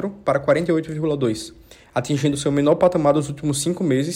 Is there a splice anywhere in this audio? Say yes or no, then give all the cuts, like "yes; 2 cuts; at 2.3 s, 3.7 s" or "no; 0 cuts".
no; 0 cuts